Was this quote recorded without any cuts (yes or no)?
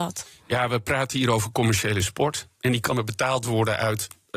no